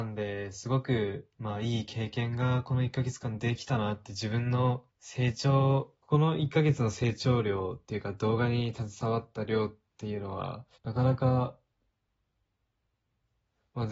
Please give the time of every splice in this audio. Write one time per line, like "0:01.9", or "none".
0:01.3
0:04.9
0:06.0
0:10.7